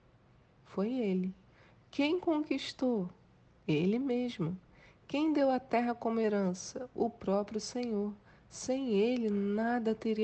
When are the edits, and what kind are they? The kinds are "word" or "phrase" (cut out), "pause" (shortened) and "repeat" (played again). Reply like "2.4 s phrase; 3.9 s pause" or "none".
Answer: none